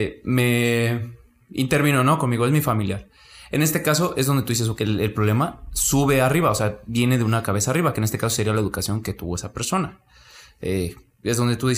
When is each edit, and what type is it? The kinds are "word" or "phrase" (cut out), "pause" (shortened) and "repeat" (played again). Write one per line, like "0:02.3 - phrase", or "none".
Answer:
0:04.8 - word